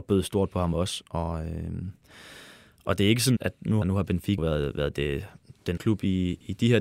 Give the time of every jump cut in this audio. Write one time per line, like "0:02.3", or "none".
0:03.4
0:03.8
0:04.4
0:05.8